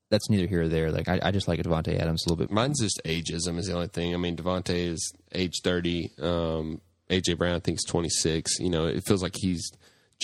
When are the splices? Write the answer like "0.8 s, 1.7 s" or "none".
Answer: 2.5 s